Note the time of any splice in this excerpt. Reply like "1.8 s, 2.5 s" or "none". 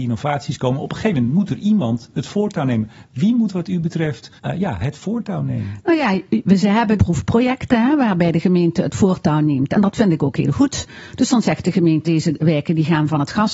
4.4 s, 7.0 s, 12.0 s

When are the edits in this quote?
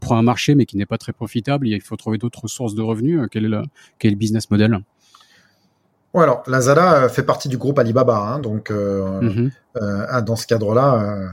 none

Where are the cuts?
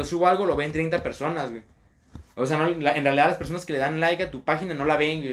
none

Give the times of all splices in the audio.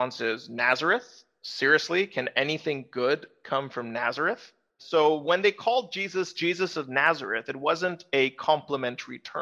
none

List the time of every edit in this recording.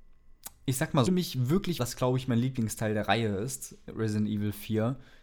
1.1 s, 1.8 s

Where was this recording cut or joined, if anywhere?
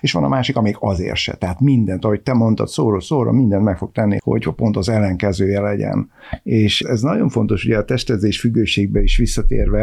4.2 s, 6.8 s

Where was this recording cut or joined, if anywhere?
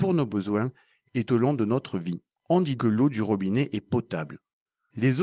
1.3 s, 2.3 s, 2.8 s

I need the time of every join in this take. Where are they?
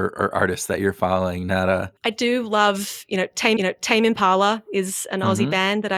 2.0 s, 3.6 s

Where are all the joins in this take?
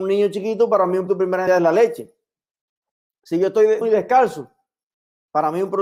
1.1 s, 1.5 s, 3.8 s

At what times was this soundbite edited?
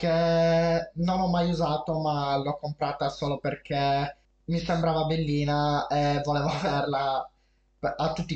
4.2 s

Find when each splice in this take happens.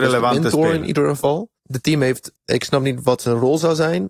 1.6 s, 2.4 s

